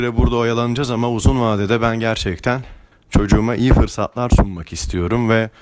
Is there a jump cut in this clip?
yes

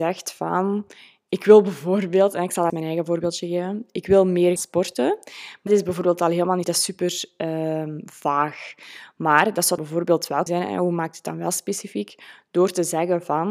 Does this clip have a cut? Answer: yes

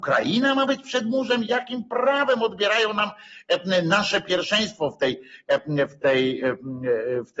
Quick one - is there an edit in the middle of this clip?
no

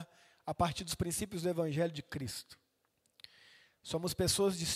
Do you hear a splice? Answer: no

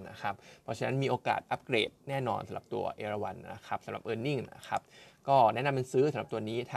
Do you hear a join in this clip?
no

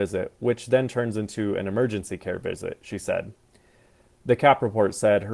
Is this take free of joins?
yes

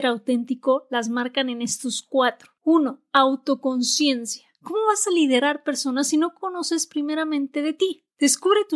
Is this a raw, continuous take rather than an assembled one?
no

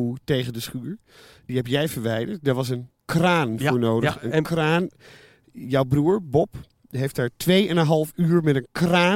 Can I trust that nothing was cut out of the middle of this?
no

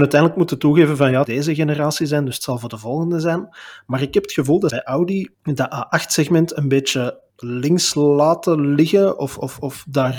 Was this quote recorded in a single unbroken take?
no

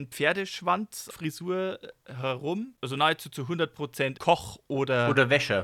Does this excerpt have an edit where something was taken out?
yes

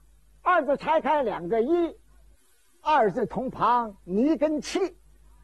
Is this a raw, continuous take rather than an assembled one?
yes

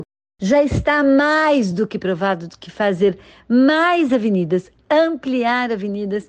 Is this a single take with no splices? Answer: yes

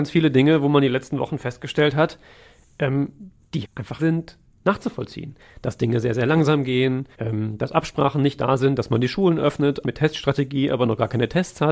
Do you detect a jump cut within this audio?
yes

